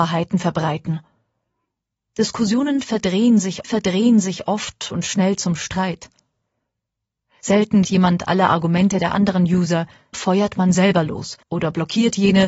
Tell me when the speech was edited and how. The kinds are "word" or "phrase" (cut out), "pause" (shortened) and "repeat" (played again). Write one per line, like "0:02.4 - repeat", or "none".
0:03.6 - repeat
0:07.8 - word
0:10.1 - word
0:11.4 - pause